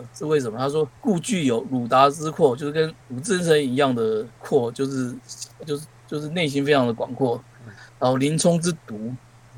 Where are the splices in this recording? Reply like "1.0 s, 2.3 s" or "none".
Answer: 1.0 s, 3.0 s, 4.4 s, 5.6 s